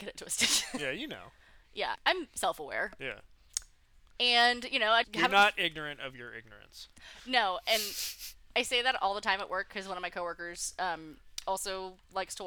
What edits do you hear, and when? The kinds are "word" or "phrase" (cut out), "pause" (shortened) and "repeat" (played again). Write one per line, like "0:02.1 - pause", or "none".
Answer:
0:02.0 - word
0:05.0 - word